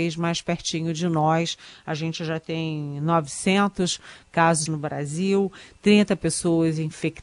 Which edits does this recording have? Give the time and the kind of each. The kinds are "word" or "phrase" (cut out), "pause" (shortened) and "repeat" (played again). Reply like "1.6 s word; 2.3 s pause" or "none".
4.7 s word